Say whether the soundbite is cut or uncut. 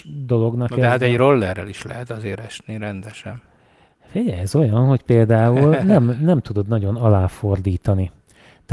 uncut